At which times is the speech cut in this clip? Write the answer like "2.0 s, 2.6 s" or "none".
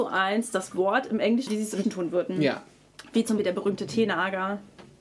1.5 s, 1.8 s, 3.4 s